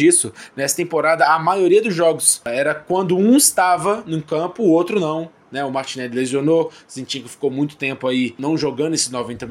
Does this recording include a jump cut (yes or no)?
no